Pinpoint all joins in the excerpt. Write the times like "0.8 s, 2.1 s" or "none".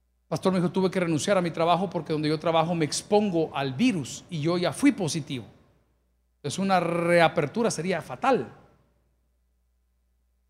none